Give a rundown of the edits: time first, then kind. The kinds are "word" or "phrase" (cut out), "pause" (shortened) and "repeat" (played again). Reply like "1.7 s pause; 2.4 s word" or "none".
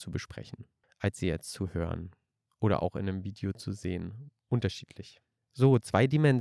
none